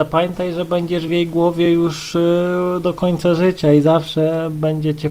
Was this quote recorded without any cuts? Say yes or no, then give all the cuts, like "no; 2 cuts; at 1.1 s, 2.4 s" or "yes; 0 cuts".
yes; 0 cuts